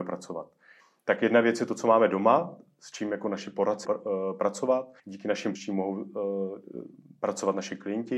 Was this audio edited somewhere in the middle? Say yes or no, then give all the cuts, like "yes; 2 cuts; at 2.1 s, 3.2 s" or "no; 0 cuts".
yes; 3 cuts; at 3.8 s, 5.0 s, 5.6 s